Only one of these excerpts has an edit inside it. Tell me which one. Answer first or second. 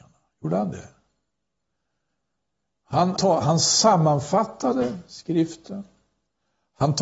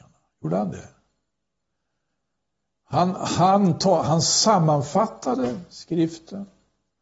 first